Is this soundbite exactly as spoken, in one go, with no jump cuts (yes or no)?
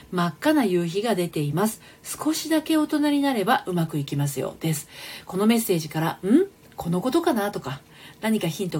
yes